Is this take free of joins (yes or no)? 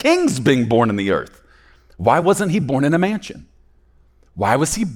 yes